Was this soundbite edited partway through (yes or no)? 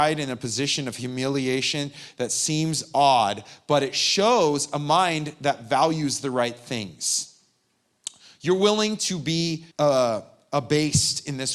yes